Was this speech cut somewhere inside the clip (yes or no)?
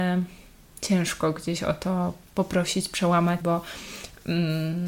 yes